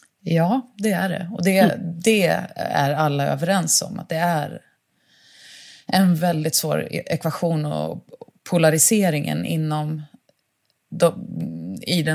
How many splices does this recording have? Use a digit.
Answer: 0